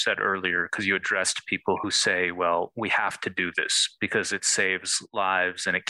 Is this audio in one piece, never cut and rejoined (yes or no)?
yes